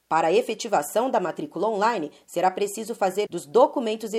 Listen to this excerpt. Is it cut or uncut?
cut